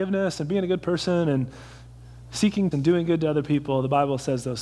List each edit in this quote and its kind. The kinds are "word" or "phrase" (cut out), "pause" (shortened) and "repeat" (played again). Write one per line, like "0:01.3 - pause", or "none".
0:02.7 - word